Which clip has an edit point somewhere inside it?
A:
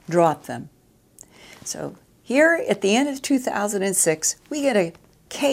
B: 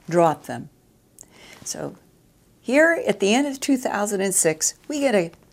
A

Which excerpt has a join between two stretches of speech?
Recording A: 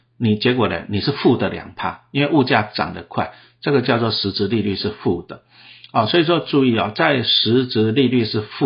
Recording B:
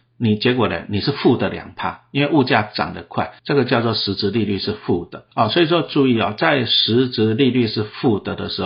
B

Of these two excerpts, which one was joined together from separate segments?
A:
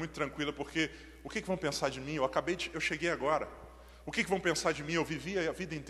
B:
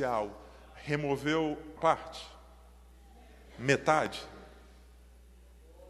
B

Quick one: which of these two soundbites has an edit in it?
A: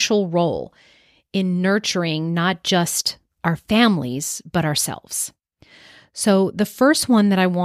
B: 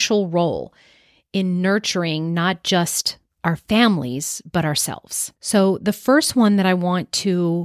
B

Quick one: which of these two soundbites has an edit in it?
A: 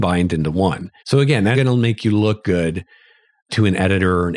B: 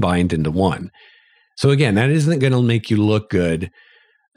A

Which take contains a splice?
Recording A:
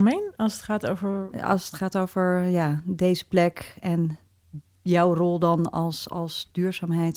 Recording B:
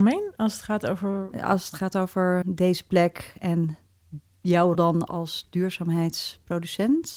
B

